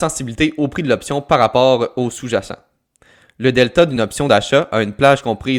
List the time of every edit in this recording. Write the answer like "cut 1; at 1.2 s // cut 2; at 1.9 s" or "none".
none